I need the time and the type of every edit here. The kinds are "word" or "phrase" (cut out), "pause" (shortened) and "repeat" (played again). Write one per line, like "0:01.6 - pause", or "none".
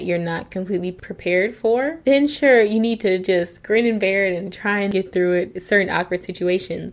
none